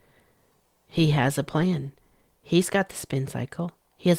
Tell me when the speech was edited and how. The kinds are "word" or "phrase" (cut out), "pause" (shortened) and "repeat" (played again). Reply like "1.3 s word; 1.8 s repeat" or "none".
none